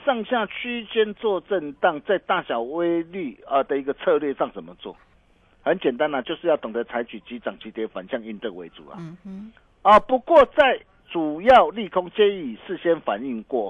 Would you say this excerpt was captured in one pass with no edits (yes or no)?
yes